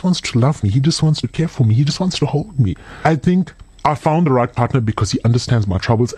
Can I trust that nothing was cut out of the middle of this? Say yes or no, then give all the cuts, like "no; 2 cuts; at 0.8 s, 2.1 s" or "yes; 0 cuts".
yes; 0 cuts